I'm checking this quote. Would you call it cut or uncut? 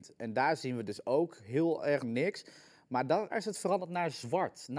cut